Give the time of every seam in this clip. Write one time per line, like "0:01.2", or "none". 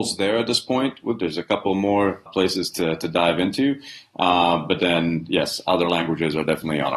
0:01.2
0:02.3